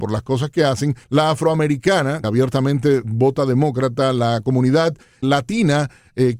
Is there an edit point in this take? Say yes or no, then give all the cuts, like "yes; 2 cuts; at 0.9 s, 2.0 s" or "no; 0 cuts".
yes; 3 cuts; at 1.0 s, 2.2 s, 5.2 s